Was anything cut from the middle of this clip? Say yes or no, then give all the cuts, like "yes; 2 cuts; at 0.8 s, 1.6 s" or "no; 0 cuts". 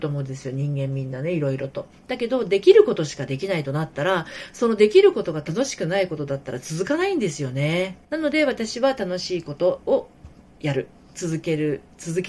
yes; 1 cut; at 8.0 s